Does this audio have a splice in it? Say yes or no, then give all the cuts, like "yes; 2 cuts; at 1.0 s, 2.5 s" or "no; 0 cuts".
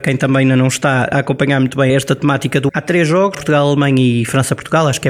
yes; 4 cuts; at 1.1 s, 1.9 s, 2.7 s, 3.3 s